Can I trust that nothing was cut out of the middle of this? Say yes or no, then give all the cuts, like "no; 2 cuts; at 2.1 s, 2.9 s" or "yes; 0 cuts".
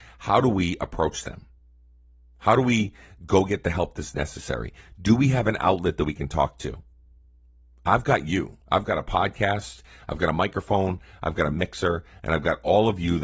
no; 1 cut; at 8.6 s